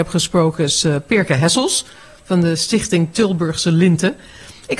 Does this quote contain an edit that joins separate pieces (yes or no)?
no